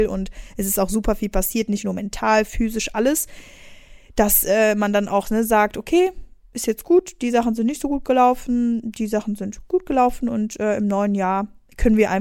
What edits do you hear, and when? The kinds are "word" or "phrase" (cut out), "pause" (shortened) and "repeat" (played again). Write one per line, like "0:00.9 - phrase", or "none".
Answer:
none